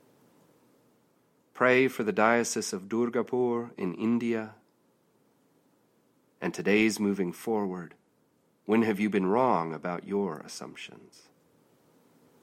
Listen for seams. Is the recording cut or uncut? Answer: uncut